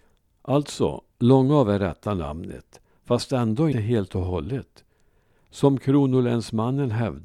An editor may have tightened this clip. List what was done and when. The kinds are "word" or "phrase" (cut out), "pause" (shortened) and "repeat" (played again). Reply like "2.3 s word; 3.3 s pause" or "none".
3.7 s word

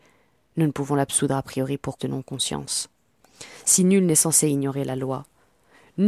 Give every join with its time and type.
2.0 s word

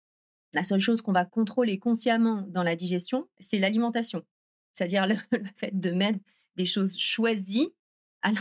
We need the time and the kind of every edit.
none

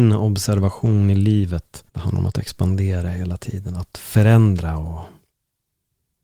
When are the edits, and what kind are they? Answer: 1.9 s pause

